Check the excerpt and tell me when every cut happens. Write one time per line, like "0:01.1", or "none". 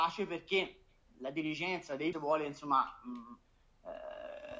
0:01.0
0:02.1